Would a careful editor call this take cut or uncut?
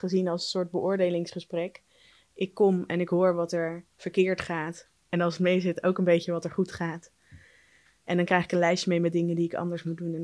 cut